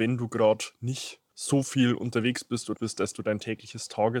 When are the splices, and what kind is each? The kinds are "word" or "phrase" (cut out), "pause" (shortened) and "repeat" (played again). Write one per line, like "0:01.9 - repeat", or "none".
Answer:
0:01.3 - pause
0:02.8 - word
0:03.1 - word